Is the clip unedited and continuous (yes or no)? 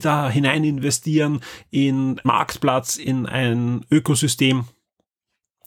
no